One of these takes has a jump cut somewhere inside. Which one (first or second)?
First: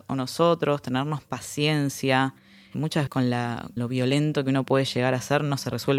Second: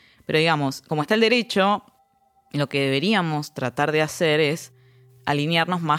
first